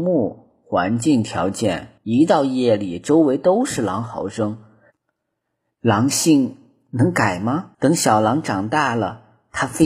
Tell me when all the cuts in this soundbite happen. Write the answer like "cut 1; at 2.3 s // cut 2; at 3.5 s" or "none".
cut 1; at 2.0 s // cut 2; at 7.7 s